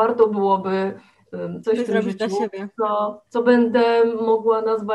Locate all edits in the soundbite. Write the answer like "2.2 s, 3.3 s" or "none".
1.6 s, 3.3 s